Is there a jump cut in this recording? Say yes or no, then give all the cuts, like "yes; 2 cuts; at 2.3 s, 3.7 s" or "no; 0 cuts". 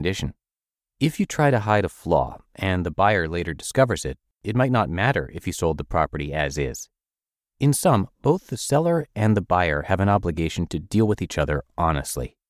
no; 0 cuts